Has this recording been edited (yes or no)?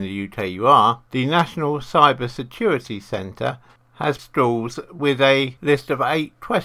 yes